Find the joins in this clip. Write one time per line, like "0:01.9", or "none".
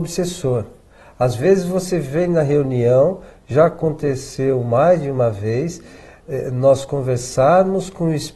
none